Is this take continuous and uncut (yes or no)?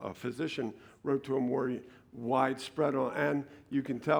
yes